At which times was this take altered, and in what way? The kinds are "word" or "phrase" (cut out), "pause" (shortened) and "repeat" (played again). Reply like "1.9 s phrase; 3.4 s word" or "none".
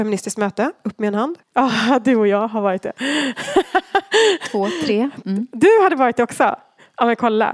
1.4 s pause